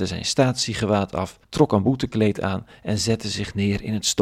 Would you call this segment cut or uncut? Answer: cut